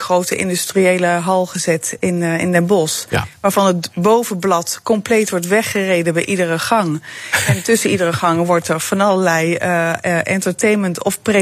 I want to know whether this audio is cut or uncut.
uncut